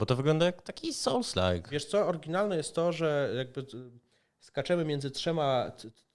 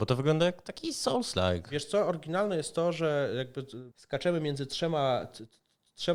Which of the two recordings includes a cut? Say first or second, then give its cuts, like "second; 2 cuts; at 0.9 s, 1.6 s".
second; 1 cut; at 3.9 s